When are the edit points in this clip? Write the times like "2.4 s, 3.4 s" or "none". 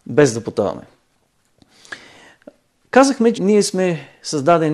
3.3 s

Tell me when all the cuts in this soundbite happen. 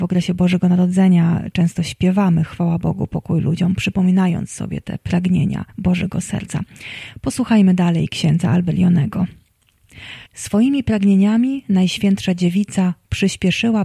5.7 s, 10.3 s

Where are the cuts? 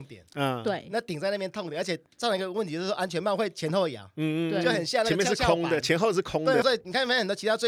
2.1 s, 6.6 s

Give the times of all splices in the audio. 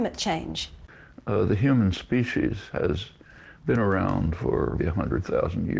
4.8 s

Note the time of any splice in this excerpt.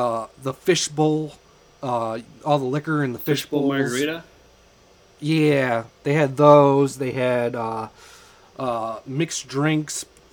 none

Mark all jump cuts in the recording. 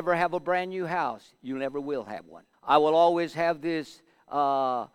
2.5 s

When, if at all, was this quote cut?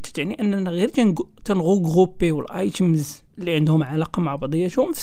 none

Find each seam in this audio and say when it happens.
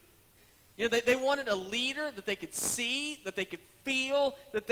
none

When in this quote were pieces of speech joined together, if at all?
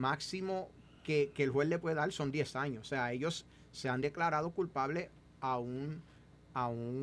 none

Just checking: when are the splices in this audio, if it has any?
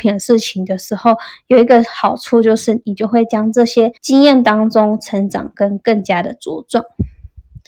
4.0 s

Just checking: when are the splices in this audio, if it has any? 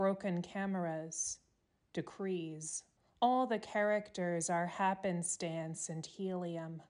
3.0 s

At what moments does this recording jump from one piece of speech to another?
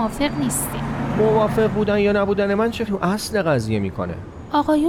2.9 s

